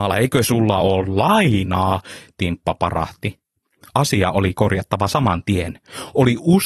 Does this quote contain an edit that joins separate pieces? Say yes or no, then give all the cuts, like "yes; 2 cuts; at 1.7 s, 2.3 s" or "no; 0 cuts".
no; 0 cuts